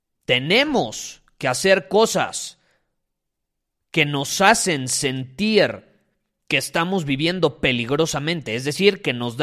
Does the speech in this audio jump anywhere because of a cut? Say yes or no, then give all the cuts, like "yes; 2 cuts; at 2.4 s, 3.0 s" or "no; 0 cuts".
no; 0 cuts